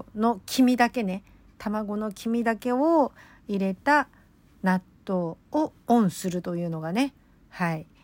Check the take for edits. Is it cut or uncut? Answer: cut